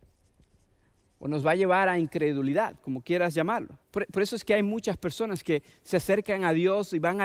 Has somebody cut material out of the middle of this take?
yes; 1 cut; at 3.8 s

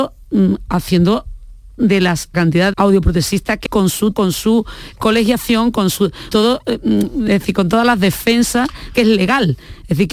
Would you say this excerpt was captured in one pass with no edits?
no; 8 cuts; at 1.8 s, 2.3 s, 2.7 s, 3.7 s, 4.1 s, 5.0 s, 6.3 s, 8.9 s

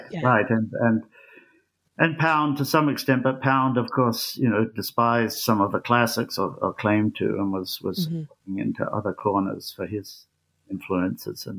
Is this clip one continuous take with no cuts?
yes; 0 cuts

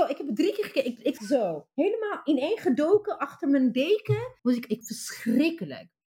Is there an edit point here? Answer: yes; 3 cuts; at 1.2 s, 4.4 s, 4.8 s

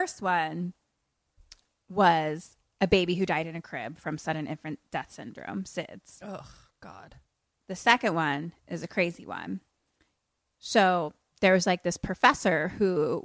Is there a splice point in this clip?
no; 0 cuts

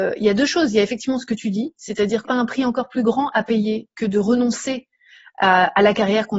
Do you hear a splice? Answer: yes; 1 cut; at 2.2 s

